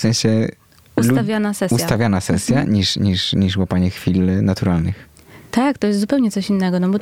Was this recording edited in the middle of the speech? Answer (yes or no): no